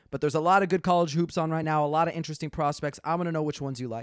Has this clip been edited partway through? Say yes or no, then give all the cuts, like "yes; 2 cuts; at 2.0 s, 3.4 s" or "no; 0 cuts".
no; 0 cuts